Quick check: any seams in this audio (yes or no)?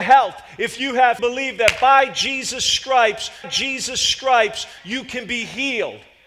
yes